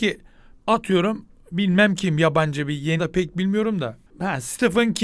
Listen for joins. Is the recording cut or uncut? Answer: cut